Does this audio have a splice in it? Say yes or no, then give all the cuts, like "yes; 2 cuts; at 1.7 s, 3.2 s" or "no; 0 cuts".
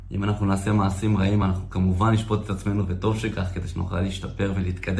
no; 0 cuts